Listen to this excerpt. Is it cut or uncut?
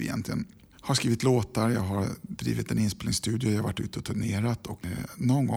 uncut